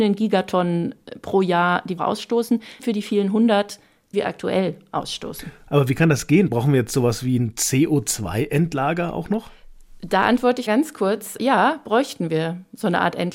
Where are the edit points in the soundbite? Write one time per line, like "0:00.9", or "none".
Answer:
0:02.0
0:02.8
0:04.1
0:10.7
0:11.4